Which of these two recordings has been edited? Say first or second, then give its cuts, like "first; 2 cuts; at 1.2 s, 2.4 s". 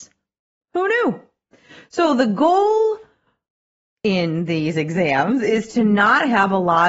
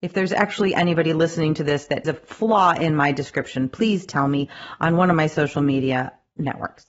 second; 1 cut; at 2.0 s